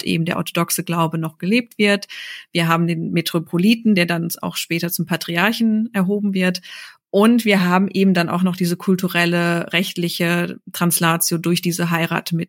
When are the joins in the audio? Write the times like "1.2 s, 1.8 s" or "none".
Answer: none